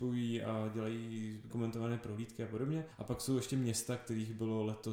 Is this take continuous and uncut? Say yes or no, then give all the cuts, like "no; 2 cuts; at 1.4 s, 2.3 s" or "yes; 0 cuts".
no; 2 cuts; at 1.5 s, 2.9 s